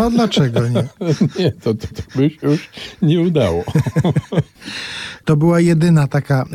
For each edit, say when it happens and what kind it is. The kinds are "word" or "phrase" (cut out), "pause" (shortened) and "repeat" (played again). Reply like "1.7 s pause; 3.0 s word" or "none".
1.9 s repeat